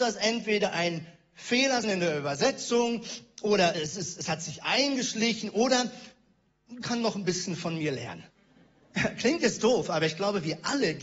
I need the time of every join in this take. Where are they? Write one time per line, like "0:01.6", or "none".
0:01.8
0:03.7
0:06.8
0:08.3